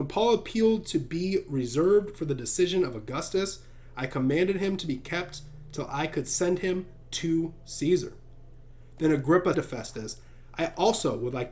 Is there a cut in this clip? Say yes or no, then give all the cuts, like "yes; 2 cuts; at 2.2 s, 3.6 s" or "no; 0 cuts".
yes; 1 cut; at 9.5 s